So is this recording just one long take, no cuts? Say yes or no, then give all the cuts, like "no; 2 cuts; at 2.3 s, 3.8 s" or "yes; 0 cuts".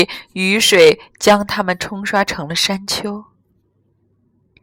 yes; 0 cuts